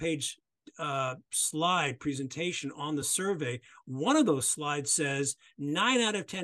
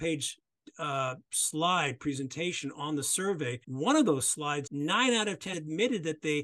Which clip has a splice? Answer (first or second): second